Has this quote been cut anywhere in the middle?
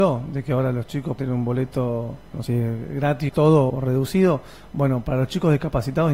yes; 4 cuts; at 1.2 s, 2.5 s, 3.3 s, 3.7 s

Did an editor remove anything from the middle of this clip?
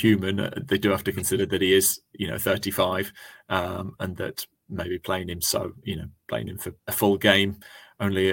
yes; 2 cuts; at 5.8 s, 6.8 s

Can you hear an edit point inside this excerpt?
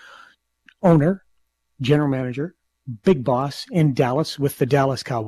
no; 0 cuts

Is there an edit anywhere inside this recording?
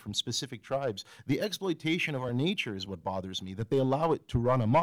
no; 0 cuts

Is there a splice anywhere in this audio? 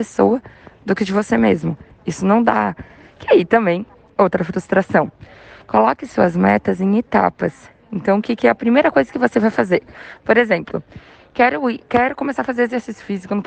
no; 0 cuts

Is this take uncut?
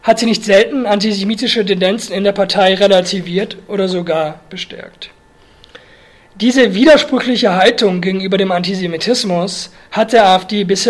yes; 0 cuts

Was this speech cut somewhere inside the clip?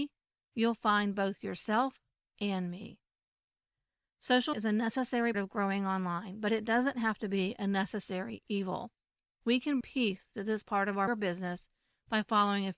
yes; 4 cuts; at 4.5 s, 5.3 s, 9.8 s, 11.1 s

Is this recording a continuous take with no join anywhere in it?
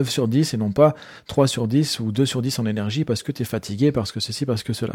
yes; 0 cuts

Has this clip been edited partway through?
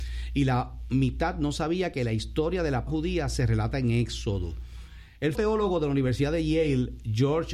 yes; 2 cuts; at 2.9 s, 5.3 s

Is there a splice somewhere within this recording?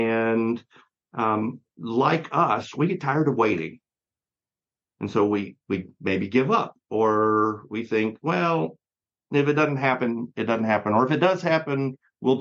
no; 0 cuts

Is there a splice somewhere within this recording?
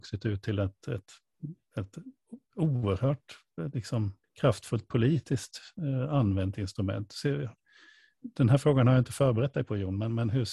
yes; 2 cuts; at 2.4 s, 4.2 s

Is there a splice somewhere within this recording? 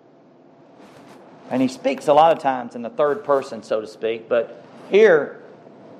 no; 0 cuts

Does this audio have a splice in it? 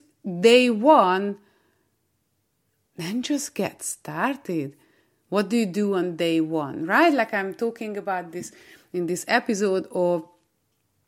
no; 0 cuts

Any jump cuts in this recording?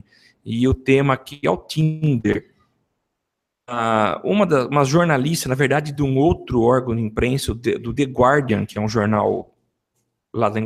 no; 0 cuts

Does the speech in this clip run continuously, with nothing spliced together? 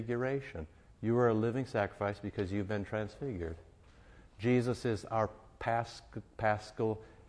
yes; 0 cuts

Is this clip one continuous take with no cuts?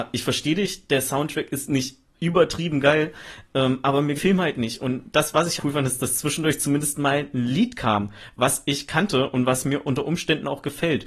no; 2 cuts; at 4.2 s, 5.6 s

